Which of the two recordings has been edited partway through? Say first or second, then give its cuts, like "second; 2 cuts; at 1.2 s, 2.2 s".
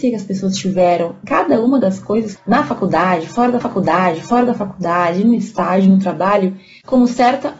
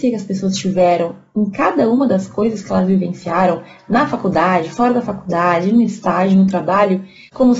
first; 3 cuts; at 1.2 s, 2.4 s, 3.6 s